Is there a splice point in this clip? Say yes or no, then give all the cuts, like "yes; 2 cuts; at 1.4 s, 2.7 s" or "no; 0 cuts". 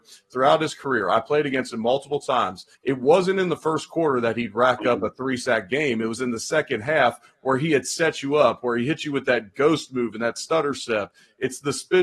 yes; 1 cut; at 2.7 s